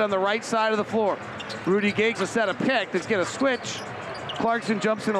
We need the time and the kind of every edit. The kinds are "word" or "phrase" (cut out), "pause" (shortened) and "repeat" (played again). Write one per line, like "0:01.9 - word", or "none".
0:02.1 - word
0:03.0 - word